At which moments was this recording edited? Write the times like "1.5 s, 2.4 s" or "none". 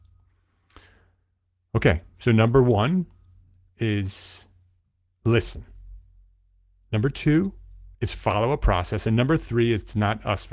4.8 s, 7.9 s